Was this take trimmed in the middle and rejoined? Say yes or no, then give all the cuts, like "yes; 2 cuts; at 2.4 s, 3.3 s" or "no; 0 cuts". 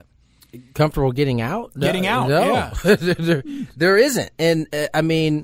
no; 0 cuts